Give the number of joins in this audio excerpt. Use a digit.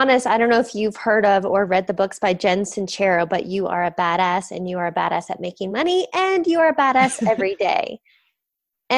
0